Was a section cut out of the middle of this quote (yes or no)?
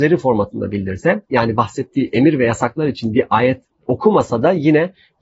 no